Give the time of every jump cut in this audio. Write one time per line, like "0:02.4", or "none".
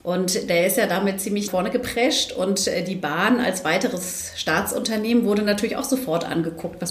0:01.5